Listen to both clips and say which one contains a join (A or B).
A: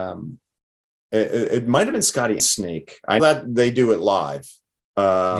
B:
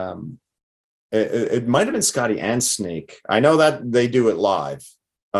A